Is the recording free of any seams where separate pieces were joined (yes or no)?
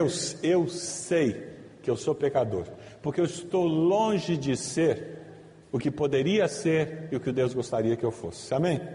yes